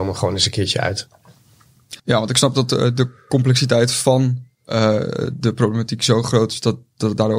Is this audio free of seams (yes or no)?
no